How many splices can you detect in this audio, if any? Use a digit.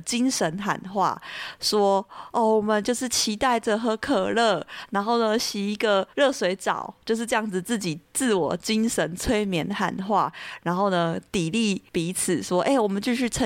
1